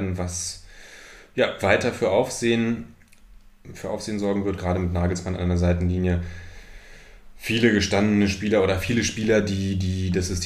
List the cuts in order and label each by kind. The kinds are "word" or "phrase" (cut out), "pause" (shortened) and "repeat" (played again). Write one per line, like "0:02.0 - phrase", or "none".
none